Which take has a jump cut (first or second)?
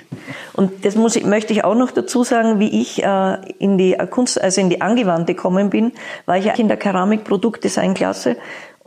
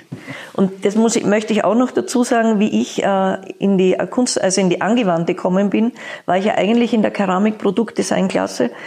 first